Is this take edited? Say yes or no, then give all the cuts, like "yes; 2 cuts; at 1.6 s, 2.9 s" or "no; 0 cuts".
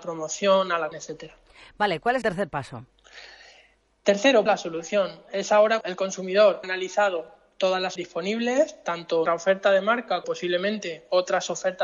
yes; 8 cuts; at 0.9 s, 2.2 s, 4.5 s, 5.8 s, 6.6 s, 8.0 s, 9.3 s, 10.2 s